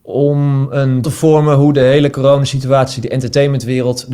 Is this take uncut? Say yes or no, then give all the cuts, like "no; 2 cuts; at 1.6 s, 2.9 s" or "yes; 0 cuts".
no; 1 cut; at 1.0 s